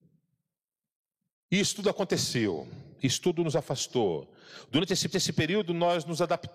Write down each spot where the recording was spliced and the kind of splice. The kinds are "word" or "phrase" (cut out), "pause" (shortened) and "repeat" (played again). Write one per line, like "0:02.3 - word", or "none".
0:05.1 - repeat